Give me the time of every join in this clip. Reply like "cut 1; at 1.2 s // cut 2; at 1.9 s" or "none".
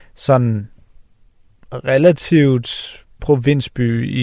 cut 1; at 3.2 s